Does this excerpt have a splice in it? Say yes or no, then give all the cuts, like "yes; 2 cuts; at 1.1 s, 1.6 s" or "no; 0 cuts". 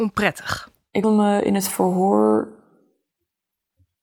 yes; 1 cut; at 1.0 s